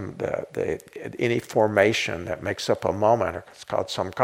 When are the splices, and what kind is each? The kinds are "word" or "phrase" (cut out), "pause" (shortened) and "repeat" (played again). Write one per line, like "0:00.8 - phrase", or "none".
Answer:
none